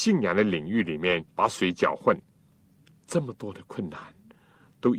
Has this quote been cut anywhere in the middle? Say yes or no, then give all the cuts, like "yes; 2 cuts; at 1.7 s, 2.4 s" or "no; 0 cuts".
yes; 2 cuts; at 1.3 s, 2.6 s